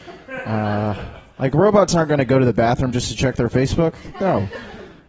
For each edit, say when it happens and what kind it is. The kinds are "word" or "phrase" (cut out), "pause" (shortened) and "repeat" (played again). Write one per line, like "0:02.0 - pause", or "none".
none